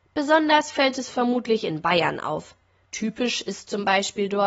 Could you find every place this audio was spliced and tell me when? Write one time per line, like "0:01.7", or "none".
none